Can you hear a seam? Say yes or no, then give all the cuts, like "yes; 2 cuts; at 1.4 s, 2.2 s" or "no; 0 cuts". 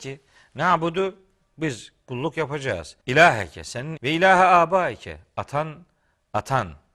yes; 2 cuts; at 3.0 s, 4.0 s